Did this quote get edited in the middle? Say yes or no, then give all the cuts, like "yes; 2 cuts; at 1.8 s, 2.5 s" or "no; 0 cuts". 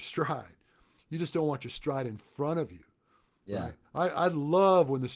no; 0 cuts